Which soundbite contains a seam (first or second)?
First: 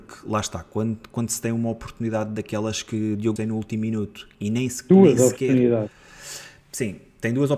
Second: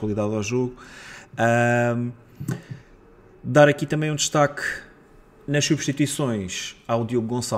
first